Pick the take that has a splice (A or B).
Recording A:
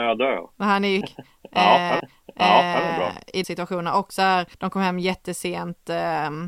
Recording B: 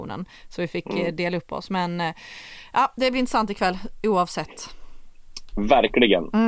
A